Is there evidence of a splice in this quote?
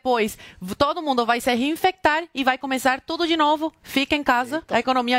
no; 0 cuts

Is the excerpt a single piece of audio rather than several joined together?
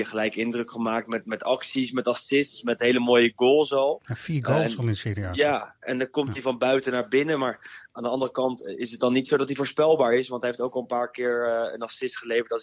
yes; 0 cuts

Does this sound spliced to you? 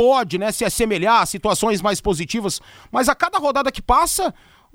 no; 0 cuts

